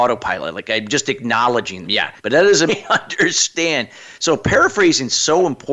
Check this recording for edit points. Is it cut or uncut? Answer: cut